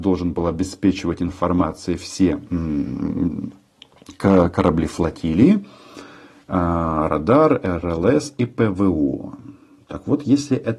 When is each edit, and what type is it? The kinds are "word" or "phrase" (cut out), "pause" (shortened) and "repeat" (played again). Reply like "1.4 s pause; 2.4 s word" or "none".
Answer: none